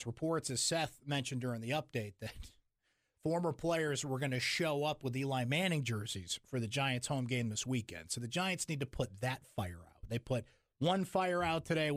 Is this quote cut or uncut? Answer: uncut